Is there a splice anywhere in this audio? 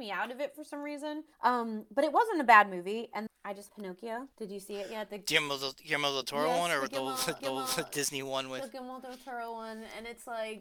yes; 5 cuts; at 1.3 s, 3.3 s, 3.7 s, 4.3 s, 7.4 s

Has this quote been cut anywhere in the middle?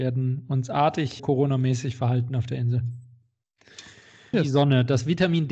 yes; 2 cuts; at 1.2 s, 4.3 s

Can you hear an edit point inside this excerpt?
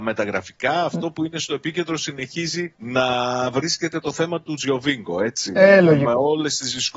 yes; 1 cut; at 2.8 s

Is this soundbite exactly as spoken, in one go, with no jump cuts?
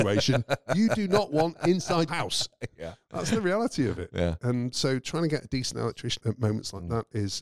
no; 3 cuts; at 2.1 s, 4.7 s, 6.2 s

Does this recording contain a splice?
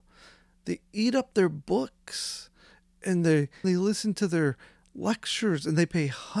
yes; 1 cut; at 3.6 s

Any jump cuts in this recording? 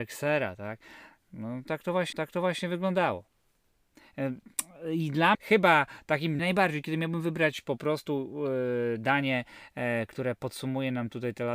yes; 3 cuts; at 2.1 s, 5.3 s, 6.4 s

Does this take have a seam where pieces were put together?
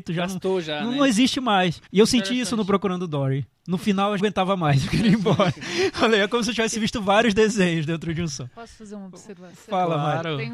yes; 2 cuts; at 1.9 s, 4.2 s

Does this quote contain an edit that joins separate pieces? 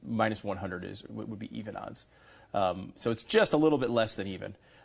no; 0 cuts

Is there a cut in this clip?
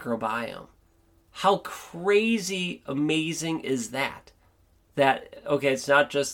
no; 0 cuts

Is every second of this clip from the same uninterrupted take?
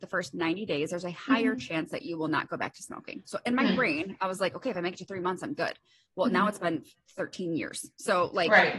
yes; 0 cuts

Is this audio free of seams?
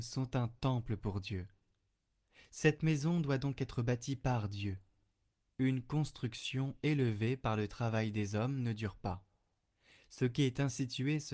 yes; 0 cuts

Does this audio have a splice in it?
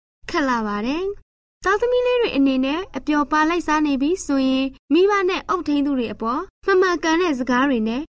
yes; 2 cuts; at 4.8 s, 6.5 s

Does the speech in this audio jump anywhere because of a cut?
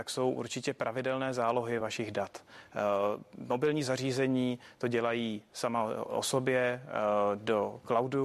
no; 0 cuts

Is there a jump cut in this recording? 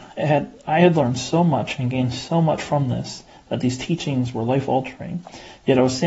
no; 0 cuts

